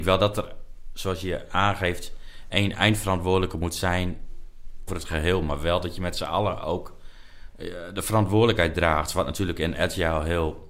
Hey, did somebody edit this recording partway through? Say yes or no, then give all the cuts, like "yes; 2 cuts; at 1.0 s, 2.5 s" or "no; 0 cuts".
yes; 1 cut; at 4.9 s